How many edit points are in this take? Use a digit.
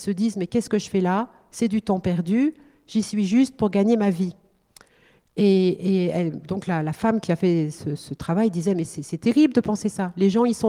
0